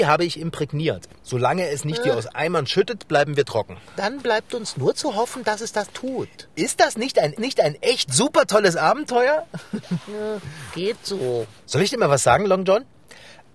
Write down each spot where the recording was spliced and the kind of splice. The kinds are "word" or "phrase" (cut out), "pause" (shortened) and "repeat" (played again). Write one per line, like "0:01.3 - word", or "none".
0:05.9 - word
0:07.4 - repeat
0:11.6 - pause